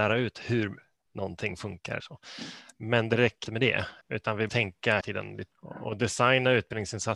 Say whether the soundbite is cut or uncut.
cut